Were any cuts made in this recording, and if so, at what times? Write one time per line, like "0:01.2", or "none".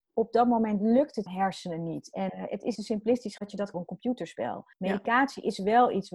0:01.3
0:02.3
0:02.7
0:03.4
0:03.7
0:04.7